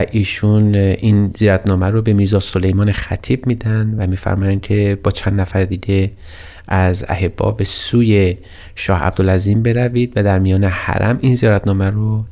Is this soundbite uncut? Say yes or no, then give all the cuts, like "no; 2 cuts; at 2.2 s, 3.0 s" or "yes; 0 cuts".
yes; 0 cuts